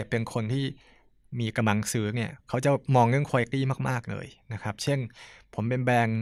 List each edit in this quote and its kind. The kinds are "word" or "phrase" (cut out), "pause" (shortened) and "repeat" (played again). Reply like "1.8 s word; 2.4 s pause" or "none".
none

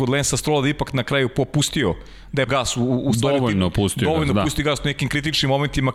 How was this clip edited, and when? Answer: 2.5 s word

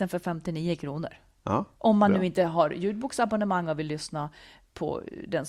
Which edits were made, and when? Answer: 1.7 s pause

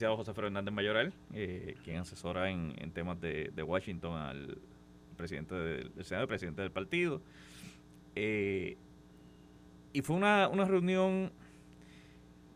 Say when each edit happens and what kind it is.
none

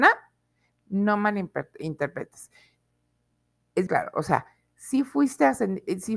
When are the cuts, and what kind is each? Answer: 3.9 s word

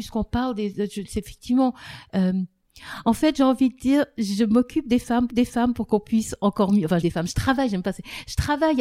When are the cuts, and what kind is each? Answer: 5.3 s repeat; 7.0 s word

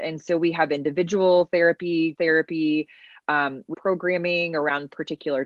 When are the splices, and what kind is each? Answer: 2.1 s word; 3.7 s word

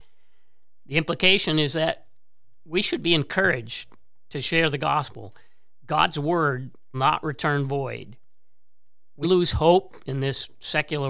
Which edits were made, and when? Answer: 6.9 s word; 9.2 s word

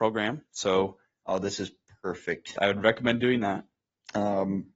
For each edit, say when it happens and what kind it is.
2.6 s word

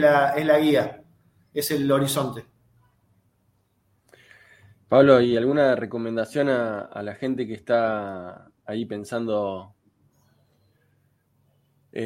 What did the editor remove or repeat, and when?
none

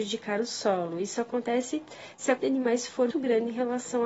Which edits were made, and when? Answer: 2.4 s word; 3.1 s word

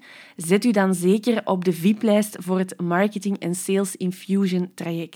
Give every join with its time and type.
none

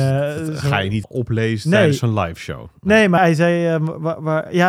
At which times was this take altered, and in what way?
1.0 s word; 3.2 s word

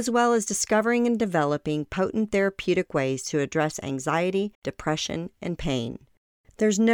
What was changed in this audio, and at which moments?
4.5 s pause

